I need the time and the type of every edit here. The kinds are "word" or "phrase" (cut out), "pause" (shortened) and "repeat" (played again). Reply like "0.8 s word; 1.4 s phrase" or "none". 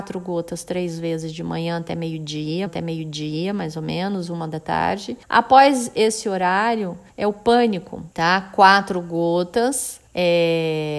2.7 s repeat; 5.2 s pause; 7.1 s pause; 8.1 s pause; 10.1 s pause